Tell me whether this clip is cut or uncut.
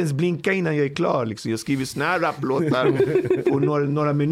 uncut